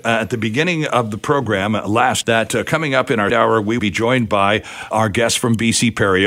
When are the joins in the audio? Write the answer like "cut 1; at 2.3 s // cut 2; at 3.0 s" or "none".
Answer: cut 1; at 2.2 s // cut 2; at 3.3 s // cut 3; at 3.8 s // cut 4; at 4.9 s